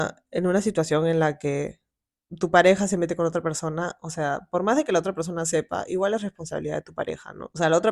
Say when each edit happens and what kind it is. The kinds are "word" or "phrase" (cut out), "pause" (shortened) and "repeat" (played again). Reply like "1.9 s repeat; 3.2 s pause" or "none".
none